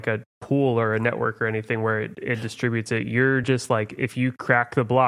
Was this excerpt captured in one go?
yes; 0 cuts

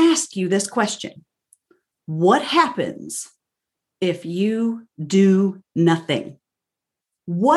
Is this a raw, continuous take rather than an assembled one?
yes; 0 cuts

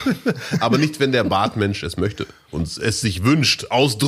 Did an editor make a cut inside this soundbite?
no; 0 cuts

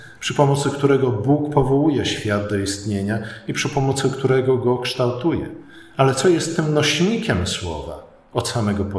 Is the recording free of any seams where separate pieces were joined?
yes; 0 cuts

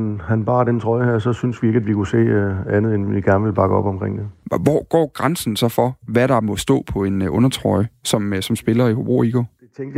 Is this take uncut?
yes; 0 cuts

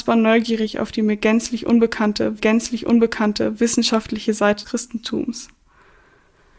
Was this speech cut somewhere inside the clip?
yes; 2 cuts; at 2.4 s, 4.6 s

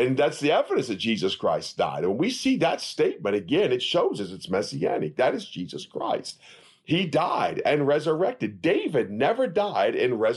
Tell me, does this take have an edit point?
no; 0 cuts

